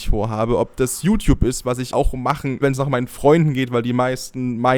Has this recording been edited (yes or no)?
yes